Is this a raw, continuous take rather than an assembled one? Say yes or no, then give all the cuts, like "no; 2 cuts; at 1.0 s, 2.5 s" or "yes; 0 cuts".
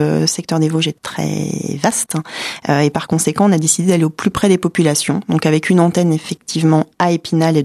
no; 1 cut; at 1.0 s